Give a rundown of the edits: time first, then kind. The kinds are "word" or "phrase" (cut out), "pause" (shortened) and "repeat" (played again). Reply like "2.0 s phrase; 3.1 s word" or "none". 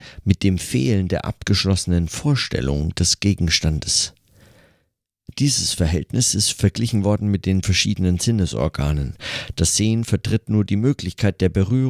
7.6 s word